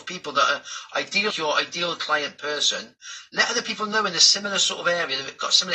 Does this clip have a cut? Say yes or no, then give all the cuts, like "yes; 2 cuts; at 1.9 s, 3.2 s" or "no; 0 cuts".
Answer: yes; 1 cut; at 1.3 s